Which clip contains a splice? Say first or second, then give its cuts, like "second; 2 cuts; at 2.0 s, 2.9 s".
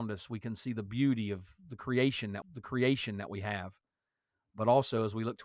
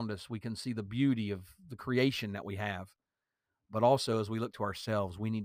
first; 1 cut; at 2.4 s